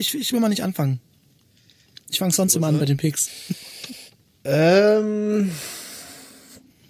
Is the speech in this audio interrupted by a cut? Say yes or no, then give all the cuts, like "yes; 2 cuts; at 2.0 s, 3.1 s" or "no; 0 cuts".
no; 0 cuts